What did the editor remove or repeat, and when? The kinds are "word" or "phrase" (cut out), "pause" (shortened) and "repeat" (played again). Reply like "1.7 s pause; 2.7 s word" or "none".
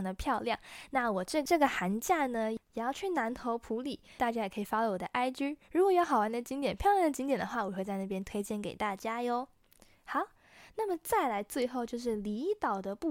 none